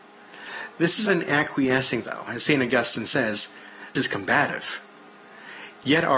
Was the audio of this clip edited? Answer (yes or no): yes